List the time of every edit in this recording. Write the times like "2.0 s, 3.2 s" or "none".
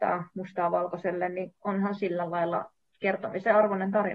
2.0 s